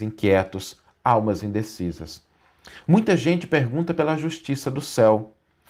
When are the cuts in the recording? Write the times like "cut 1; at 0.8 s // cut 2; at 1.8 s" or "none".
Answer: none